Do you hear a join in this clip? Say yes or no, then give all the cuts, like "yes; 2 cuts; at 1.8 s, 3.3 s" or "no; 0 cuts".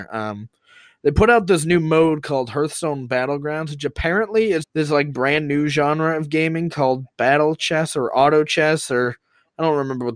yes; 1 cut; at 4.6 s